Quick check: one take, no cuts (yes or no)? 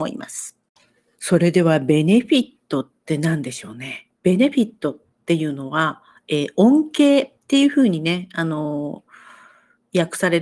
no